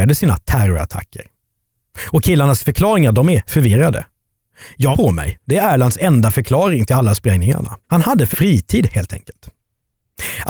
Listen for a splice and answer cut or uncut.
cut